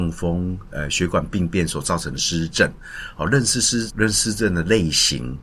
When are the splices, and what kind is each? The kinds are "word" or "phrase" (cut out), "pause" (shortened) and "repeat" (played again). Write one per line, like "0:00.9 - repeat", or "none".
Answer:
0:03.9 - word